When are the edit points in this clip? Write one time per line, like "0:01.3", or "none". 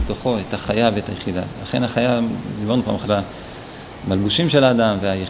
0:03.0